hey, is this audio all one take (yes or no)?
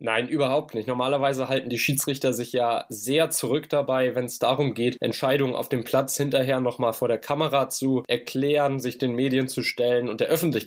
yes